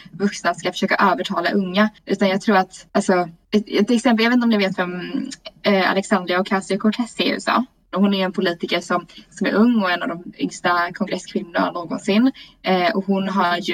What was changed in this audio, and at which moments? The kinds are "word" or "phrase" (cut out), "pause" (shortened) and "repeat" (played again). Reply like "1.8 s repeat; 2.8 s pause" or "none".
2.0 s pause